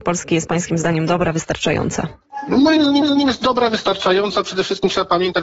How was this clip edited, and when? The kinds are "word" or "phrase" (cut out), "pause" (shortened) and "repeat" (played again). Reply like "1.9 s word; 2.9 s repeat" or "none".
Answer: 3.0 s repeat